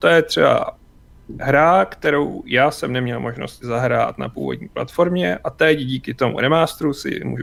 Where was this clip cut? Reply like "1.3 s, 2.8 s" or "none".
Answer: 3.6 s